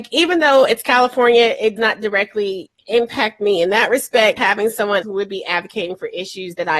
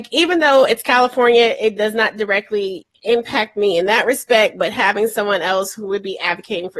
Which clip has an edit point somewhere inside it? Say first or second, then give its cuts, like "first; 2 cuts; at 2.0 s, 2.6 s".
first; 3 cuts; at 1.8 s, 4.4 s, 5.0 s